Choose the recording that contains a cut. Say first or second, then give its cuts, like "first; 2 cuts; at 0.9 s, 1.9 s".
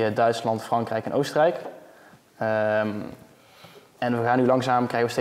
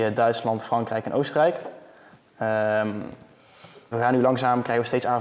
second; 1 cut; at 3.9 s